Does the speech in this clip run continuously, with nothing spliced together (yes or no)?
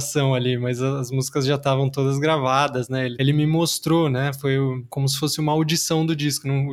yes